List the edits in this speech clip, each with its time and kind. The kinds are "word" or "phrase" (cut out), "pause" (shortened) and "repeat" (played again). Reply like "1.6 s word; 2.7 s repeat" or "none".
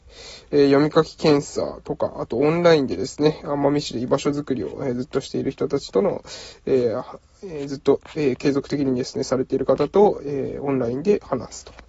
none